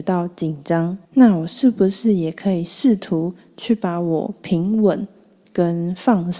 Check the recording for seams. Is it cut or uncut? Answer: cut